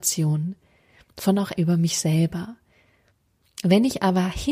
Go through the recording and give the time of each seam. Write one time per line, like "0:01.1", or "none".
0:01.6